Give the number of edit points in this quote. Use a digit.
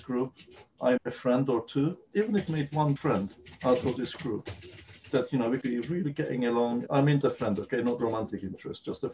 8